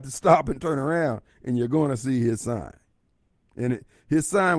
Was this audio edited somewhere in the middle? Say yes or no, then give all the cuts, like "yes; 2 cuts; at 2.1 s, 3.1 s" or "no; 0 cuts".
no; 0 cuts